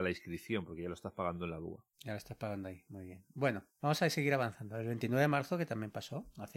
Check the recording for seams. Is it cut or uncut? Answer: cut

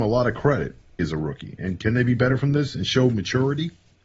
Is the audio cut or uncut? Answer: cut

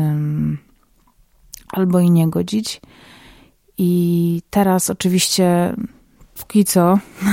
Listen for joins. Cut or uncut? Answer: uncut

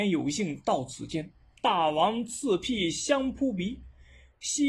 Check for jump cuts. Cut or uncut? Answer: uncut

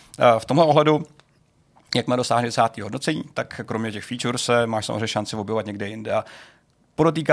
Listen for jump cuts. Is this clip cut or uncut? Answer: uncut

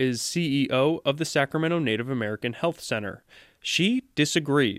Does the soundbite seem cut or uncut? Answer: uncut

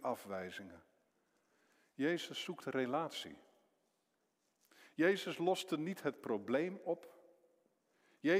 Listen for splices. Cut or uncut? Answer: uncut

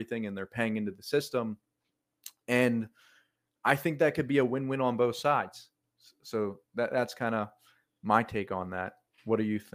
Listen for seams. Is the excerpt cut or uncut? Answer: uncut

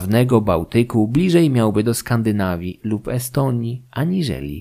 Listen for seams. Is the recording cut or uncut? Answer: uncut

